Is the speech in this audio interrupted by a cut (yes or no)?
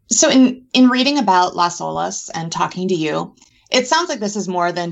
no